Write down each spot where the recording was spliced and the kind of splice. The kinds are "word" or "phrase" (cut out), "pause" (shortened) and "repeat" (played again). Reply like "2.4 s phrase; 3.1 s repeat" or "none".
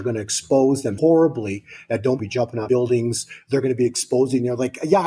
1.0 s word; 2.2 s phrase; 2.7 s word